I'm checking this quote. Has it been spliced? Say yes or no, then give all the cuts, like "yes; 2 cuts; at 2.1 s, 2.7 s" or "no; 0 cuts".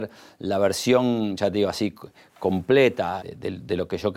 yes; 1 cut; at 3.2 s